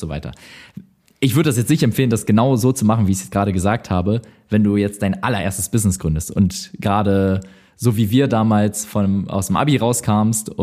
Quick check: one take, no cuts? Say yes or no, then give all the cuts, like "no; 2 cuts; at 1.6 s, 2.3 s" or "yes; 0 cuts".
yes; 0 cuts